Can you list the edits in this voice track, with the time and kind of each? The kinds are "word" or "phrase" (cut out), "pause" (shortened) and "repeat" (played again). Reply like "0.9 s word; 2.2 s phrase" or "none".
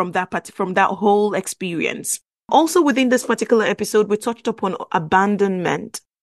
none